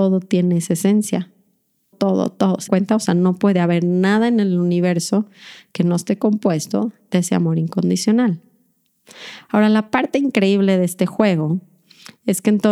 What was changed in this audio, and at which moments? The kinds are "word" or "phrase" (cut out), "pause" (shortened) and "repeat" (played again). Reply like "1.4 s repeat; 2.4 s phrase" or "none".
1.9 s word; 2.7 s word